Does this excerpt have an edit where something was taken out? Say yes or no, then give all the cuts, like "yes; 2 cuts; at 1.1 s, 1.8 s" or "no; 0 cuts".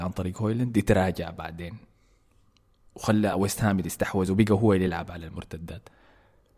no; 0 cuts